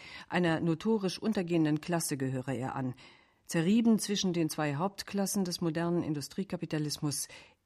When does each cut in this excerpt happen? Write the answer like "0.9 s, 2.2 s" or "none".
none